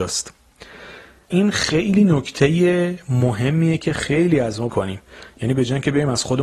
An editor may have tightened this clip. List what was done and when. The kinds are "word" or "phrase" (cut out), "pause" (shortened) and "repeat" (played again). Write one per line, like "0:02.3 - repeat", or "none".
0:01.3 - word
0:04.7 - phrase